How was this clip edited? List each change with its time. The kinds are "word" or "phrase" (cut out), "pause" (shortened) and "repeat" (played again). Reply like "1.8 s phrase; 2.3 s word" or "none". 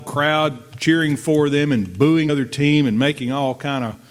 2.3 s word